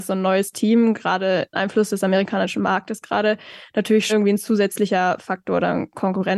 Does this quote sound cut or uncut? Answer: cut